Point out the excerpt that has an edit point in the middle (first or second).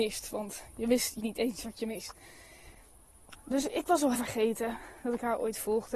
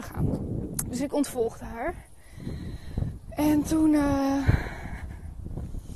first